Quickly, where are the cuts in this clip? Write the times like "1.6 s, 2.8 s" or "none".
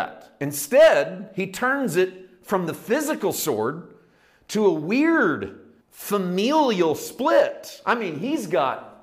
5.8 s